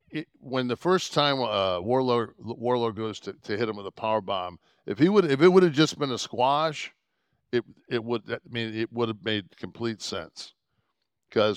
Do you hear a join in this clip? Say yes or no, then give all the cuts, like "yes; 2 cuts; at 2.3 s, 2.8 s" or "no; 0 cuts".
no; 0 cuts